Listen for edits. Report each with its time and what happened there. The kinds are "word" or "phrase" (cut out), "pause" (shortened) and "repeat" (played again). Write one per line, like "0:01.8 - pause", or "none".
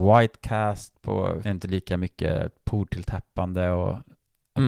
0:01.4 - phrase